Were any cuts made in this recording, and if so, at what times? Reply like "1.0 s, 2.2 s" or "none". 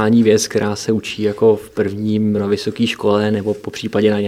2.4 s